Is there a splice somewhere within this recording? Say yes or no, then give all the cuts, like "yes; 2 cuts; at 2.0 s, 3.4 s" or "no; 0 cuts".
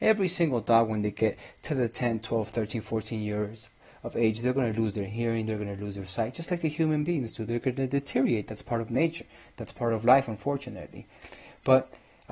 no; 0 cuts